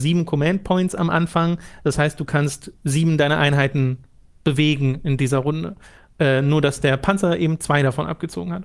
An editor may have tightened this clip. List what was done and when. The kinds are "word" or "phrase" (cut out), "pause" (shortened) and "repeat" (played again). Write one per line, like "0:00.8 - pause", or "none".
none